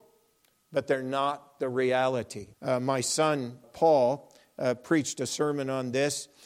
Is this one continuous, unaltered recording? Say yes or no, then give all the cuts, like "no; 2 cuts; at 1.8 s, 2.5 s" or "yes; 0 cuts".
no; 2 cuts; at 2.5 s, 3.6 s